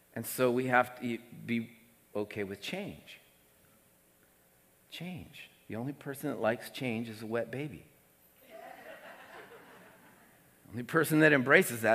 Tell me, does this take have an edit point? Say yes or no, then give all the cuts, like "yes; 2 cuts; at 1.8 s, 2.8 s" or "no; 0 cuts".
no; 0 cuts